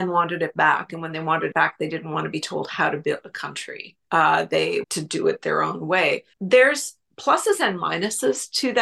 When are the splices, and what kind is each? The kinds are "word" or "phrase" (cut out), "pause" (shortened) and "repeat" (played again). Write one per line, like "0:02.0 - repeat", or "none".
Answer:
0:01.5 - word
0:03.2 - word
0:04.0 - pause
0:04.8 - word
0:06.3 - pause